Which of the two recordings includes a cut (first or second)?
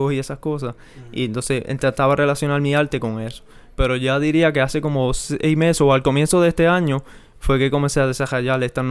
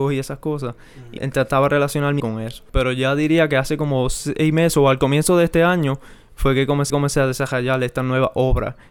second